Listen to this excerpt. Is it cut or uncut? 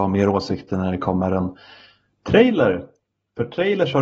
uncut